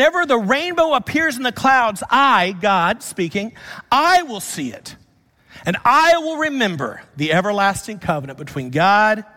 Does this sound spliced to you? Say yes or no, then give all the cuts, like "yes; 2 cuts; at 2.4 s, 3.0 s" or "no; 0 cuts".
no; 0 cuts